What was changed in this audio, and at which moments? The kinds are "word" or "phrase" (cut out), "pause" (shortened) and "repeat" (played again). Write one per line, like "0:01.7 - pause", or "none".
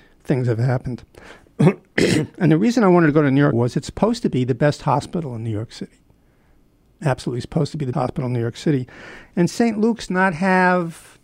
0:03.5 - word
0:07.9 - word
0:10.1 - word